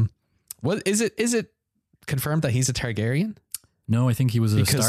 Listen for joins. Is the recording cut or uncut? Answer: uncut